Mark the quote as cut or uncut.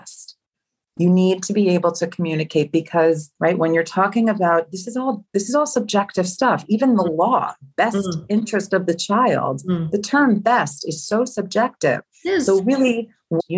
cut